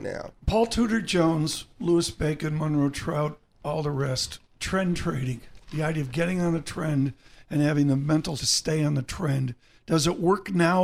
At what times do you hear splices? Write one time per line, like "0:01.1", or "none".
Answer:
0:08.4